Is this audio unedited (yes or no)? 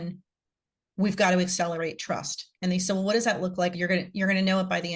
no